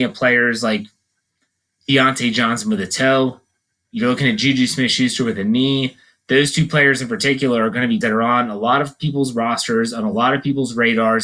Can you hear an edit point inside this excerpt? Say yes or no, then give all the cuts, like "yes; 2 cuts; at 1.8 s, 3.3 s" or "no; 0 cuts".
yes; 1 cut; at 8.0 s